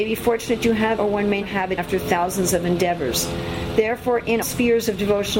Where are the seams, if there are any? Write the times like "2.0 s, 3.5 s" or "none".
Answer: 1.0 s, 1.4 s, 1.8 s, 4.4 s